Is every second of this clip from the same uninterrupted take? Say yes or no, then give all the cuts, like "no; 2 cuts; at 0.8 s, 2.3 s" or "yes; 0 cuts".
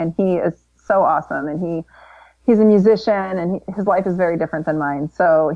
yes; 0 cuts